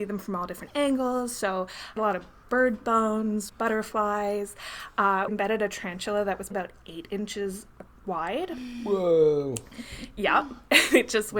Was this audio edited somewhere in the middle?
yes; 5 cuts; at 2.0 s, 2.4 s, 3.5 s, 5.3 s, 6.5 s

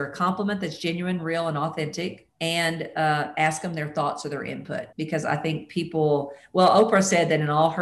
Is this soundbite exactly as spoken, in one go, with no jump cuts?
no; 2 cuts; at 2.3 s, 4.9 s

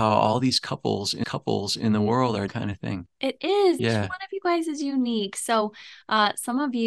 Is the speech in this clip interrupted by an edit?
yes; 4 cuts; at 1.2 s, 2.5 s, 3.1 s, 3.8 s

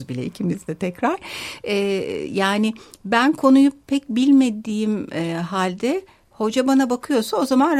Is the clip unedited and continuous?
yes; 0 cuts

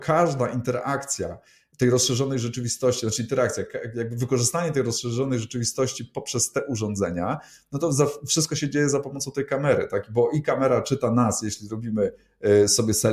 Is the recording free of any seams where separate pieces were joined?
yes; 0 cuts

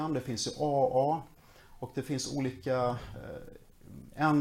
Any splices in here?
no; 0 cuts

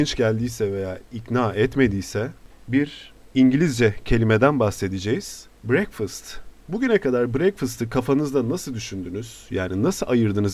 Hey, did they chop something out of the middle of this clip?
yes; 1 cut; at 5.5 s

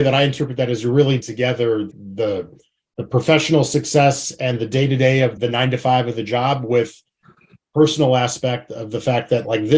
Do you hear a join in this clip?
yes; 3 cuts; at 1.2 s, 1.9 s, 5.4 s

